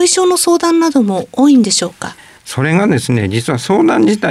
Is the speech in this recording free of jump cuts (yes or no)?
yes